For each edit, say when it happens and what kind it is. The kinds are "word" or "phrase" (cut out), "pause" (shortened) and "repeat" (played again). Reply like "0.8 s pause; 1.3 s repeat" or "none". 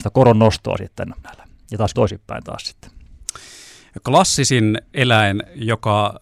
1.2 s word; 1.9 s phrase